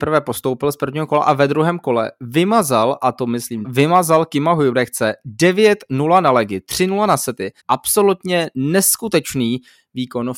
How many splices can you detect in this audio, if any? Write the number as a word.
two